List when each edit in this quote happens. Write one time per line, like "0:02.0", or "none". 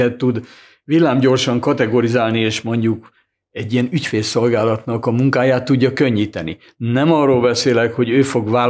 none